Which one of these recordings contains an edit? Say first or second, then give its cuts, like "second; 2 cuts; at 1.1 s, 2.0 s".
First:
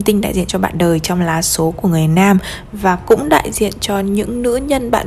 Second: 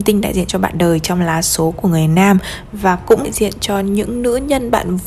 second; 1 cut; at 3.2 s